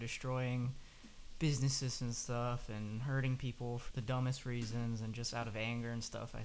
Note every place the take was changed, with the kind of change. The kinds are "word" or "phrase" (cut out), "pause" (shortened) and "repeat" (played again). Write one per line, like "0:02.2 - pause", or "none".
0:03.9 - word